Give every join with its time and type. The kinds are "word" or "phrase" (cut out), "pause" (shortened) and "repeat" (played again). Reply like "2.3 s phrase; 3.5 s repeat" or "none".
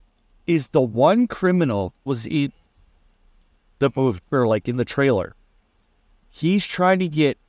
2.1 s word

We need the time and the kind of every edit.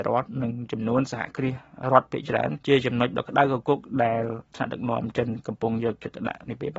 2.6 s pause

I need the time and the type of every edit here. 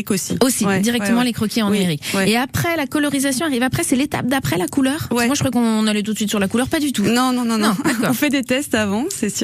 none

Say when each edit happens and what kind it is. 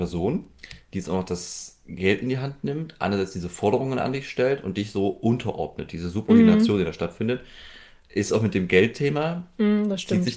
none

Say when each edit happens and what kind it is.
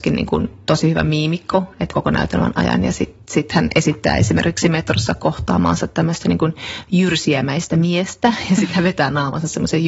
1.9 s phrase

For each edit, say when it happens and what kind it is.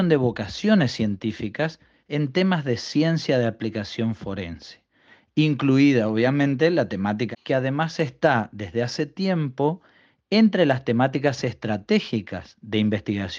7.3 s word

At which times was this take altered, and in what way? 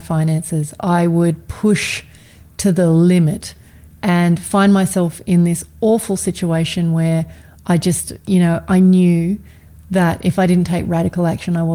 none

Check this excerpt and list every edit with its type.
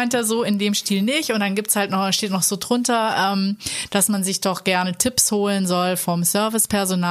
none

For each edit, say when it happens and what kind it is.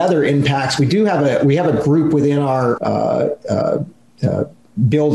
2.8 s word

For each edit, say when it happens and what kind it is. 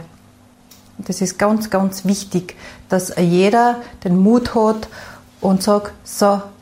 none

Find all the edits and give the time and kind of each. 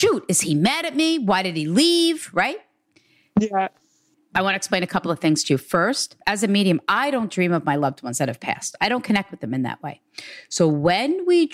6.2 s pause

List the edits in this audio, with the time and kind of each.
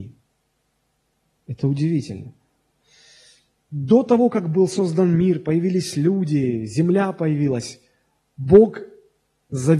none

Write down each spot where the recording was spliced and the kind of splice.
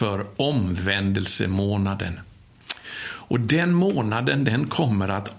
none

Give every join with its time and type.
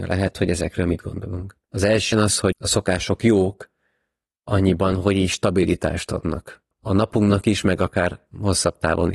1.6 s pause; 2.1 s word; 2.5 s word; 6.7 s pause

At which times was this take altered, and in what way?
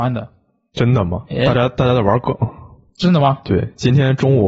none

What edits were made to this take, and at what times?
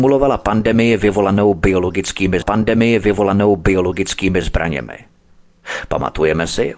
2.4 s repeat

